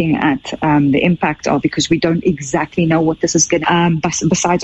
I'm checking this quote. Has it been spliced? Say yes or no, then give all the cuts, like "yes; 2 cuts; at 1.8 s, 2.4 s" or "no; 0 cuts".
yes; 1 cut; at 3.6 s